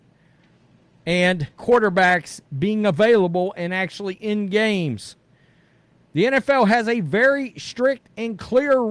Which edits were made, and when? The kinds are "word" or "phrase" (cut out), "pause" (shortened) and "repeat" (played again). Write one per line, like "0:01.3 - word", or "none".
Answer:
0:01.6 - word